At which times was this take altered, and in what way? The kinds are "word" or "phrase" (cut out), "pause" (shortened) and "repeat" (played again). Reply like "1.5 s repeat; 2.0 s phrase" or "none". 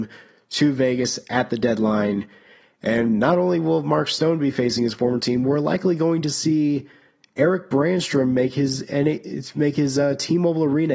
none